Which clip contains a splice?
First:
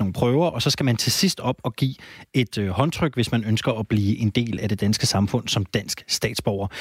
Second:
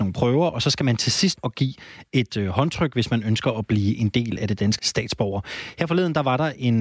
second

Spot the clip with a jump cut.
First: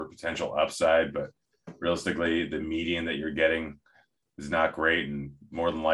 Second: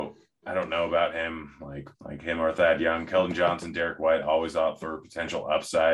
second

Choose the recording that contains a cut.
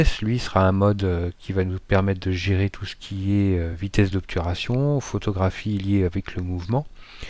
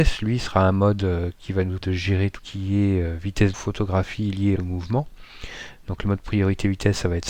second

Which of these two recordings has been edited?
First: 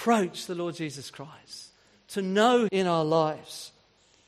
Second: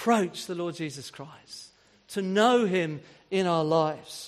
first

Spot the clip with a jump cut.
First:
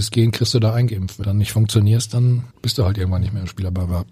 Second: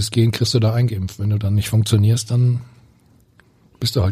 first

